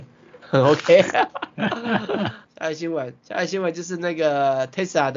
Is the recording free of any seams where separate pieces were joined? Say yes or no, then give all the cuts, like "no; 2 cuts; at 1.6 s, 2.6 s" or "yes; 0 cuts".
no; 2 cuts; at 2.5 s, 3.2 s